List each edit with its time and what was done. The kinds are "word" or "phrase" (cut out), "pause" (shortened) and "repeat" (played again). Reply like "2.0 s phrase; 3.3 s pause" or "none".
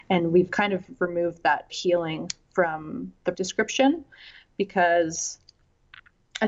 1.7 s word; 3.3 s word

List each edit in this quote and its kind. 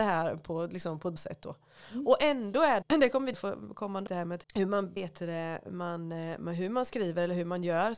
1.2 s word; 2.8 s word; 3.3 s word; 4.1 s word; 4.4 s word; 5.0 s word

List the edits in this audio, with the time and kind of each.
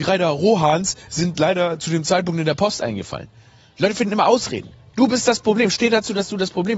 none

